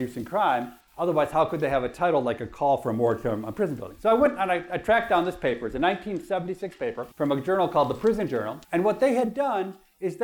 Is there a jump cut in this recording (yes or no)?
yes